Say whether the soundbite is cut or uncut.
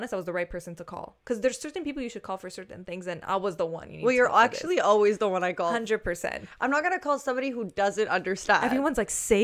uncut